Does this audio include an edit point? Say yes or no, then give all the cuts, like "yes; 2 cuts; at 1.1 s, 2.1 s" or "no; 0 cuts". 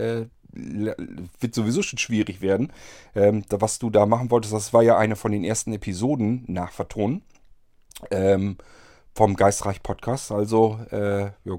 no; 0 cuts